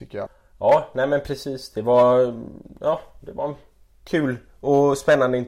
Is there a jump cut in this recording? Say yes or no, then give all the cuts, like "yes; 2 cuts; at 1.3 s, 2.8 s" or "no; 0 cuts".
no; 0 cuts